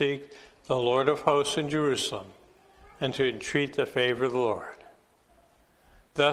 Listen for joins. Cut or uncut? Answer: uncut